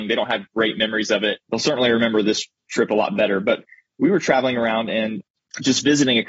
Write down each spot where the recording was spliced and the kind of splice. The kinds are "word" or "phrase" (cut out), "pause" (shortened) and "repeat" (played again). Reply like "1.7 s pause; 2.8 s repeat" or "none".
1.4 s pause